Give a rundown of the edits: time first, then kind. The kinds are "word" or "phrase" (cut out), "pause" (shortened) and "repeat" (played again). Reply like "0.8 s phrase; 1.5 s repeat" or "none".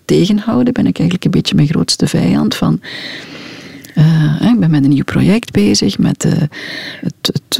none